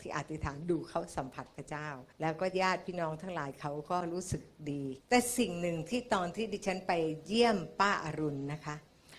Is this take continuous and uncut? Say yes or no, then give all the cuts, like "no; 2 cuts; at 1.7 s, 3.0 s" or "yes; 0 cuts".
no; 2 cuts; at 2.1 s, 5.0 s